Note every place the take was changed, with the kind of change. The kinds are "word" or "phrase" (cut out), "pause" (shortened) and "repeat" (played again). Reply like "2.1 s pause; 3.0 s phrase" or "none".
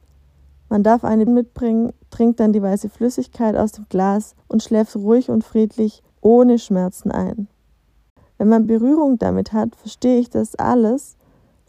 1.3 s word; 4.4 s pause; 6.1 s pause; 8.1 s pause; 8.7 s phrase